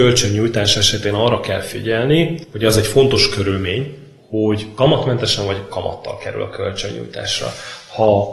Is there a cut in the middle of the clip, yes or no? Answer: no